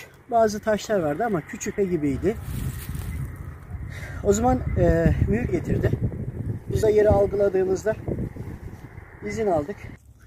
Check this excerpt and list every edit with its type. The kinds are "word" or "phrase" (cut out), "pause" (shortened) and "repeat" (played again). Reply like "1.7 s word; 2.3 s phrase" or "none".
1.8 s phrase; 5.5 s phrase; 6.8 s word

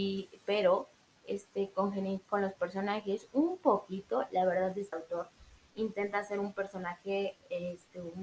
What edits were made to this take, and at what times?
4.9 s word

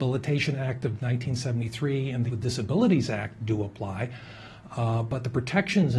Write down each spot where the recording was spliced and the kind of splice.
2.3 s word

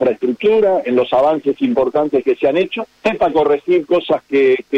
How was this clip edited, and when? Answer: 3.0 s pause

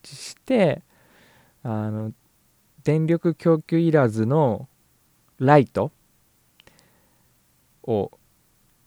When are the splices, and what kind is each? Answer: none

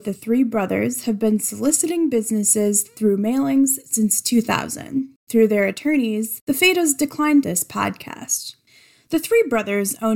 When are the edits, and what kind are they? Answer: 5.2 s pause; 7.4 s phrase

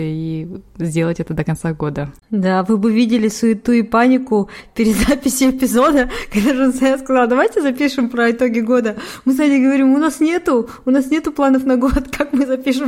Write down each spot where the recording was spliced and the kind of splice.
2.2 s pause

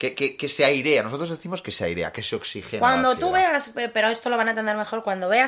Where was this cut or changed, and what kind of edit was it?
none

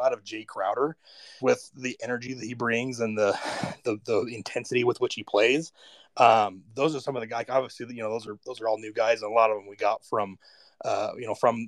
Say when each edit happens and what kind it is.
1.4 s word

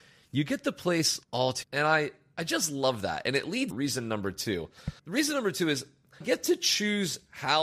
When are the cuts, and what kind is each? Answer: 1.2 s pause; 1.6 s word; 3.7 s word; 5.0 s pause; 6.2 s word

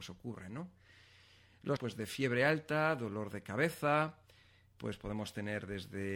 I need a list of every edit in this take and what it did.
1.8 s word

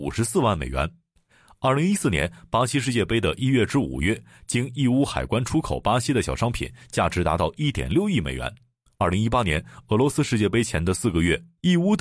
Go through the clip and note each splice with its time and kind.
none

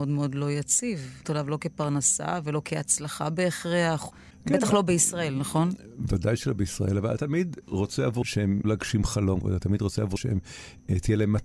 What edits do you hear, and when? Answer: 1.2 s word; 7.2 s word; 8.2 s word; 8.6 s word; 9.4 s word; 10.2 s word

